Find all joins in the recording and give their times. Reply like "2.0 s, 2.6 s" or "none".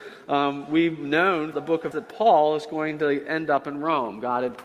1.5 s, 1.9 s

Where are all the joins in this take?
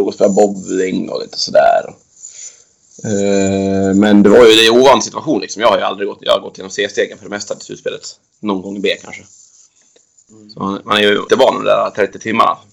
11.3 s

